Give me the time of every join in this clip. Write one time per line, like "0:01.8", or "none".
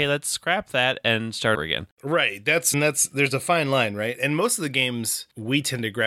0:01.5
0:01.9
0:02.7